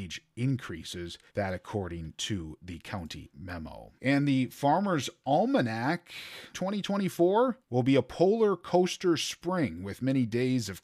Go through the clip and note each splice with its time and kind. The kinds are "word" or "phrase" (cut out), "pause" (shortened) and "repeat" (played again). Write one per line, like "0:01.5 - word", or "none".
0:01.3 - pause
0:04.0 - pause
0:06.5 - phrase
0:07.6 - pause